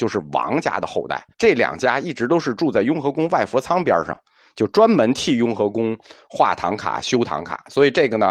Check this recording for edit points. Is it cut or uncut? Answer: cut